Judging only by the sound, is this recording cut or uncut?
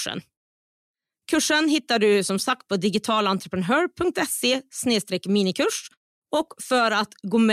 uncut